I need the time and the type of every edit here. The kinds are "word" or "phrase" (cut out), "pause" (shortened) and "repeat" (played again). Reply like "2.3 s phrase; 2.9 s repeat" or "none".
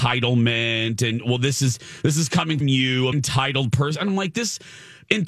2.6 s word; 3.1 s word

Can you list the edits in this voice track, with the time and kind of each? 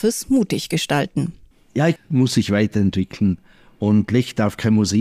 1.5 s pause; 2.0 s phrase

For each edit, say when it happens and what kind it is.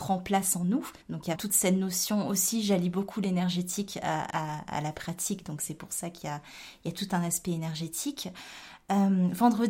1.0 s pause; 1.4 s word; 4.3 s word

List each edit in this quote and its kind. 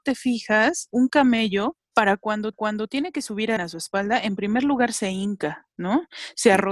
0.9 s word; 1.8 s pause; 2.5 s repeat; 3.6 s word; 5.7 s pause

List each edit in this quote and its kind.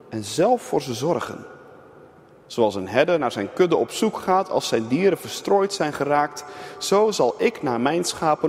none

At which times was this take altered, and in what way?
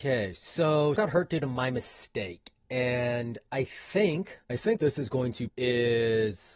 1.0 s word; 4.4 s pause; 4.8 s word; 5.5 s word

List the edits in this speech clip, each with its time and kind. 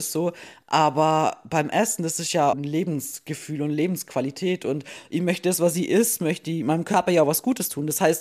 2.5 s word

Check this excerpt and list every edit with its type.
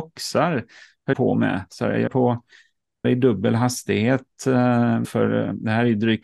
1.1 s word; 2.1 s word; 3.0 s word; 5.0 s word

